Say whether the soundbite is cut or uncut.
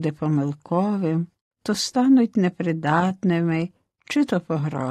uncut